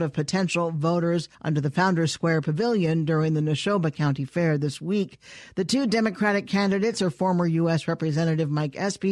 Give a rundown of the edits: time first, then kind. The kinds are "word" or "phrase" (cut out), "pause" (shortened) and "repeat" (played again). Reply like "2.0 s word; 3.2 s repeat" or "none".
1.3 s pause